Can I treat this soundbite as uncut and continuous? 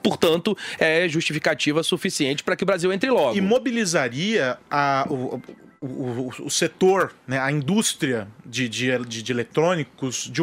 yes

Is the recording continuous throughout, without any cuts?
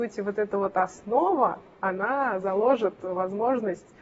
yes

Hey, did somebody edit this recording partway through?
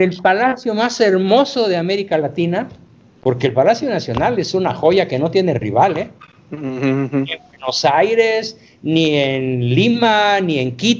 no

